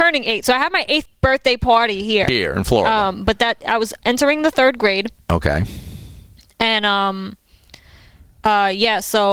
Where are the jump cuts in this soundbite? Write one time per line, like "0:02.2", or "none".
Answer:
none